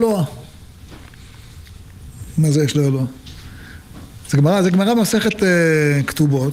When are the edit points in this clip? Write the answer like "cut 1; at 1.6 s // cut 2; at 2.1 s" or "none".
none

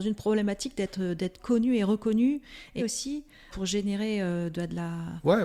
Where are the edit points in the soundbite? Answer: cut 1; at 2.8 s // cut 2; at 3.5 s

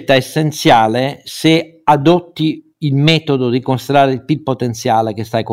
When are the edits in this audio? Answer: none

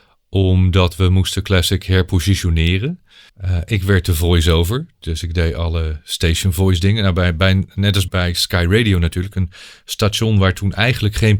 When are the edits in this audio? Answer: cut 1; at 3.3 s // cut 2; at 8.1 s

